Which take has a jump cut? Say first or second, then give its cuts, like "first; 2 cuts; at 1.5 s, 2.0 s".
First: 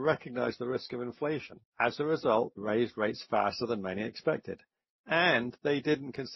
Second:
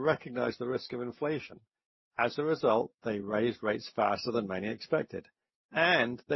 first; 2 cuts; at 1.6 s, 2.6 s